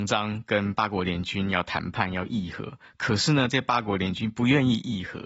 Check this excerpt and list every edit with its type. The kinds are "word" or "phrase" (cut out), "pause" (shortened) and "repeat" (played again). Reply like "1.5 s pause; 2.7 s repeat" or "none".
none